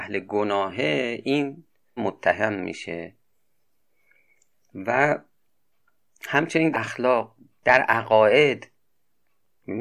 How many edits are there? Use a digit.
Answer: 2